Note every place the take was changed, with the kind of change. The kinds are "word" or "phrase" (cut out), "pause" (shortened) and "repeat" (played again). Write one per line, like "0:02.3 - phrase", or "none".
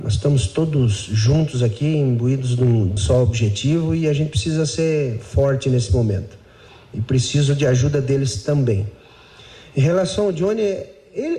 0:03.0 - word